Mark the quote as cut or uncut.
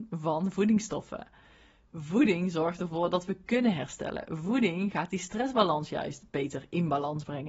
uncut